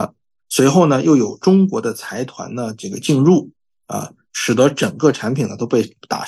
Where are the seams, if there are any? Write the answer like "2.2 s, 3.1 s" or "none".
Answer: none